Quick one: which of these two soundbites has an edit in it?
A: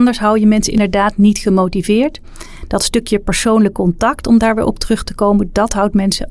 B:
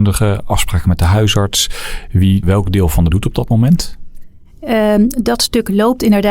B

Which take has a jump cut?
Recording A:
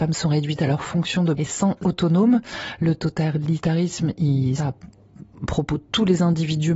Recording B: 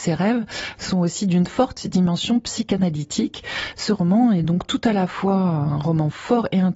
A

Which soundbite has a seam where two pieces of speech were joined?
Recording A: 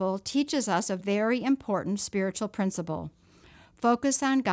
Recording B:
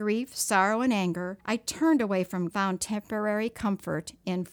B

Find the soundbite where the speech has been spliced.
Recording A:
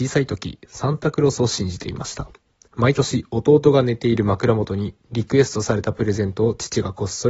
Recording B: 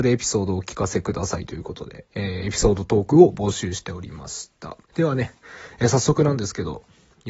B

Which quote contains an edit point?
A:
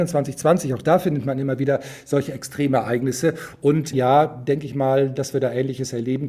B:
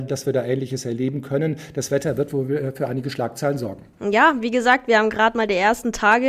A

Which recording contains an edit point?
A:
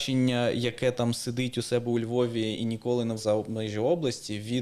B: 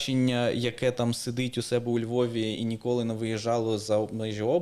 A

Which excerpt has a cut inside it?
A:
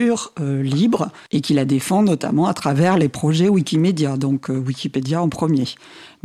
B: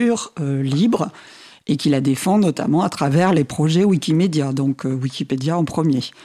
A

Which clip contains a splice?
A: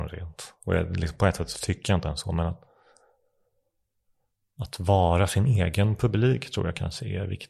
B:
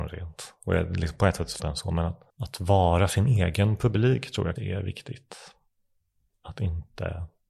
B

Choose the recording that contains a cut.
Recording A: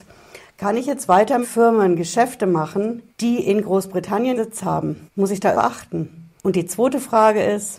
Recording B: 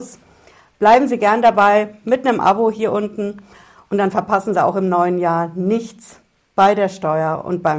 A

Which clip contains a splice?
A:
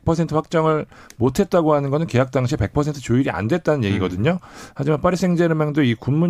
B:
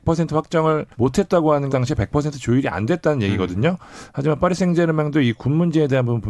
B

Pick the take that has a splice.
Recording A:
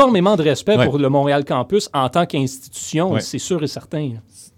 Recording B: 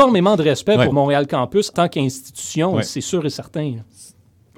B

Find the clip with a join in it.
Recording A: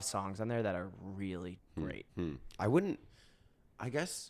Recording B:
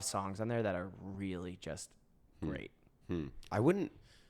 A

